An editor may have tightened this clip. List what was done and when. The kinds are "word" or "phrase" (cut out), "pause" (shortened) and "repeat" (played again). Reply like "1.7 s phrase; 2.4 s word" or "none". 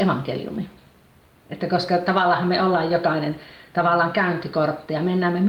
none